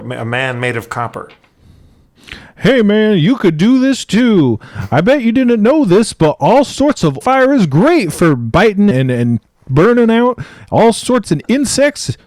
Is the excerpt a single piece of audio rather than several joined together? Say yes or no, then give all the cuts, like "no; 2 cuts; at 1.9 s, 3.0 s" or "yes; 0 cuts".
no; 3 cuts; at 7.2 s, 8.9 s, 11.2 s